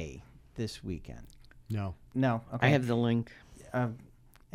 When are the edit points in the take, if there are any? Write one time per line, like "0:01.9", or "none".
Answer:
none